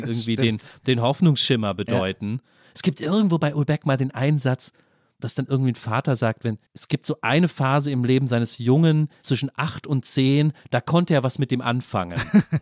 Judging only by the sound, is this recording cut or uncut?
cut